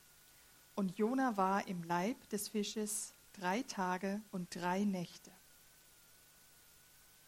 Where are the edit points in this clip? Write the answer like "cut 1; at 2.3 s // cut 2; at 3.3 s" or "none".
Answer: cut 1; at 4.3 s